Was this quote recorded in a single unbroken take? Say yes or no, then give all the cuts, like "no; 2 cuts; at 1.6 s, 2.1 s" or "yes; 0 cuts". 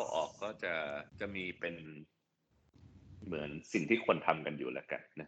no; 1 cut; at 1.1 s